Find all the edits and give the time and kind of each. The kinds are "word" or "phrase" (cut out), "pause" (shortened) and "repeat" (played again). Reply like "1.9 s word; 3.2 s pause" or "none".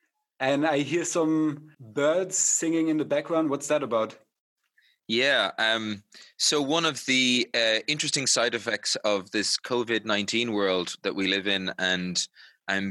none